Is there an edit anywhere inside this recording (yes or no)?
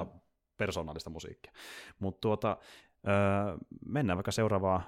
no